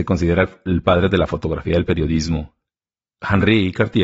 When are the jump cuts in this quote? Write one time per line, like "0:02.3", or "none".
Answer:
none